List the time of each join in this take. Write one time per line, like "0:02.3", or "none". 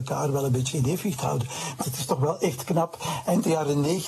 0:01.8